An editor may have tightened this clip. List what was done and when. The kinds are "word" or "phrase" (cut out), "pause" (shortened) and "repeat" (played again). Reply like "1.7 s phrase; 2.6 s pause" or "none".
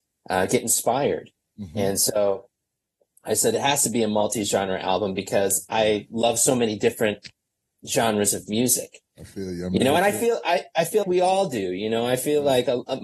11.0 s word